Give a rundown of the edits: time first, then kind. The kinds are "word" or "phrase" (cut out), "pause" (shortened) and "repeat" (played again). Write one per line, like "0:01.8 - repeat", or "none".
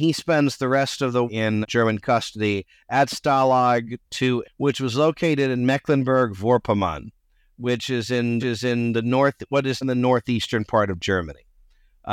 0:01.3 - word
0:01.6 - word
0:04.4 - word
0:08.4 - repeat
0:09.8 - word